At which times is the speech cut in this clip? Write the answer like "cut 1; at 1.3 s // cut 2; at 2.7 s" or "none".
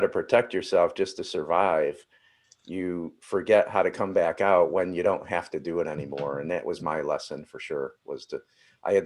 none